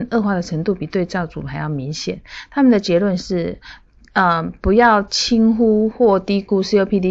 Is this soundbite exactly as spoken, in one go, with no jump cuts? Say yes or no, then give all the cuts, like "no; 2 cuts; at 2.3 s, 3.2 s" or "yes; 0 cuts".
yes; 0 cuts